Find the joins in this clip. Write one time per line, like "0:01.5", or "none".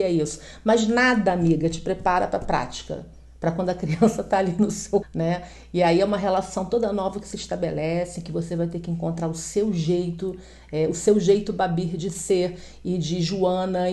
0:05.0